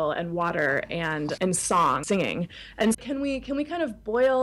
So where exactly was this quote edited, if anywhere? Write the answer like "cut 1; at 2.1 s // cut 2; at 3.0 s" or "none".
cut 1; at 1.4 s // cut 2; at 2.0 s // cut 3; at 2.9 s